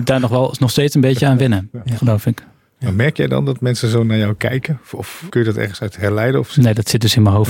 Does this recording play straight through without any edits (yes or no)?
no